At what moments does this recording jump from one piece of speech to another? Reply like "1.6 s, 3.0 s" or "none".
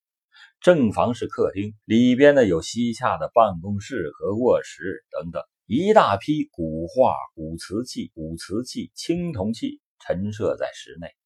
1.8 s, 5.5 s, 8.1 s